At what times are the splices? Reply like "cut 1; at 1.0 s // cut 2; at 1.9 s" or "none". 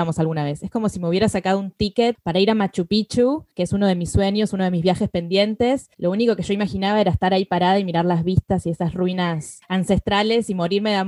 cut 1; at 3.5 s // cut 2; at 5.9 s

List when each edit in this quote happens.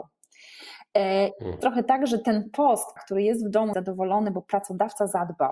cut 1; at 1.6 s // cut 2; at 3.0 s // cut 3; at 3.7 s

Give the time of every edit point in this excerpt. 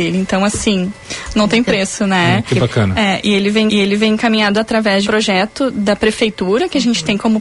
cut 1; at 3.7 s // cut 2; at 5.0 s

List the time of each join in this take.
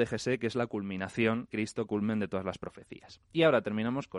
cut 1; at 1.5 s // cut 2; at 1.9 s

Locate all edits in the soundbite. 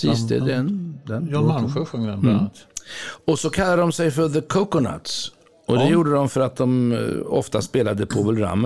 none

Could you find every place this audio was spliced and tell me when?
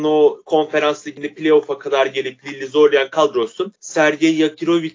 none

